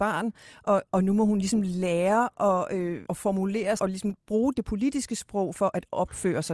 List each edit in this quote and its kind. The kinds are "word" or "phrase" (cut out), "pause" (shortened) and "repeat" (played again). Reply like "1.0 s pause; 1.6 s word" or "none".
3.1 s word; 3.8 s word; 5.5 s word